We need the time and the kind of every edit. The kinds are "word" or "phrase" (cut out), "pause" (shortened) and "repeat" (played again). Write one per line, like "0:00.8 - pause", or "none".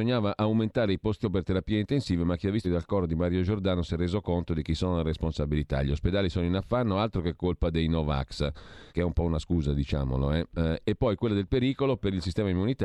0:01.2 - word
0:02.6 - phrase
0:08.9 - pause